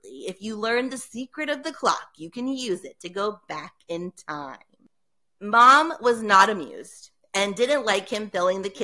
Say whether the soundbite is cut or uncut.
uncut